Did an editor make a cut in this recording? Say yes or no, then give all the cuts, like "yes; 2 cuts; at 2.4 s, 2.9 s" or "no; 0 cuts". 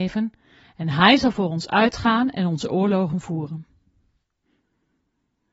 no; 0 cuts